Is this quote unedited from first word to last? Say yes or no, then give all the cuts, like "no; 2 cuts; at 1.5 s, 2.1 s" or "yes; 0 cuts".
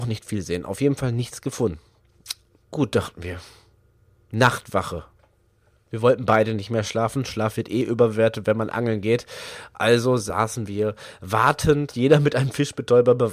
yes; 0 cuts